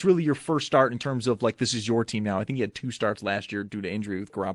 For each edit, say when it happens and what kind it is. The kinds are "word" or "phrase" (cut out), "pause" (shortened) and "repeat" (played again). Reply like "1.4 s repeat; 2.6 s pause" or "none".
none